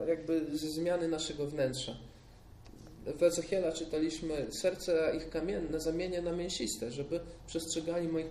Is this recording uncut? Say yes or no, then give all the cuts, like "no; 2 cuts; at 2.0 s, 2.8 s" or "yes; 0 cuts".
yes; 0 cuts